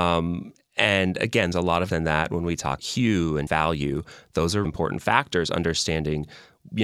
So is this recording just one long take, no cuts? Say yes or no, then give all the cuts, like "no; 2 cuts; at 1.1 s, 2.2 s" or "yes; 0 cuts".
no; 5 cuts; at 1.5 s, 1.9 s, 2.8 s, 3.5 s, 4.6 s